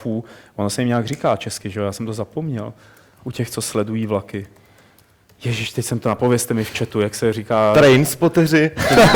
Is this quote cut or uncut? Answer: uncut